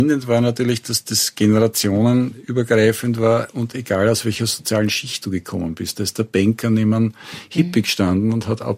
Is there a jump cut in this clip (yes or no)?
no